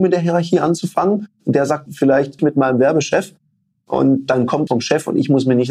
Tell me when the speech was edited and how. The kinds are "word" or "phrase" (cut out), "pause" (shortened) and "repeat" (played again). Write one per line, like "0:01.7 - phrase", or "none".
0:01.9 - word
0:02.4 - word
0:04.7 - word